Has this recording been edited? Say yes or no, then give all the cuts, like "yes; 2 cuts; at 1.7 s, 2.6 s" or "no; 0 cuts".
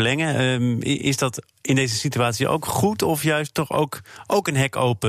no; 0 cuts